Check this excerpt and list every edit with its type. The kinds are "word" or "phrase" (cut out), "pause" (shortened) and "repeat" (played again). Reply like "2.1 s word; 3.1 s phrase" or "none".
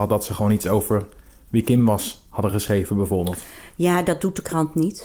none